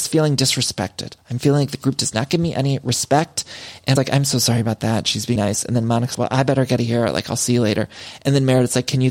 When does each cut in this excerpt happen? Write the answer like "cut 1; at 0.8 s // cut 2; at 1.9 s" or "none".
cut 1; at 4.0 s // cut 2; at 5.4 s // cut 3; at 6.1 s // cut 4; at 6.8 s